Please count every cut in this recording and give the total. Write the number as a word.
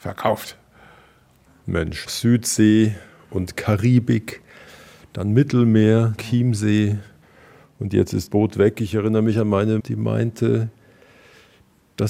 four